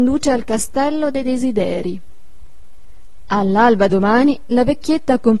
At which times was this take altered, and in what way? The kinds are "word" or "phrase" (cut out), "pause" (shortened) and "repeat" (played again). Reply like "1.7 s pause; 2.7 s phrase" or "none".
3.9 s word